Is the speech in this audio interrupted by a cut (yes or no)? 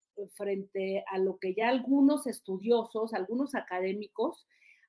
no